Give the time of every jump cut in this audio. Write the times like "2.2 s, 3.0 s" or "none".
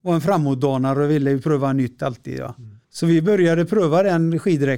2.8 s